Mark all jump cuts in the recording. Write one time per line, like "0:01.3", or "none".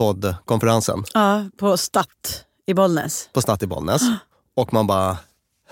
0:04.3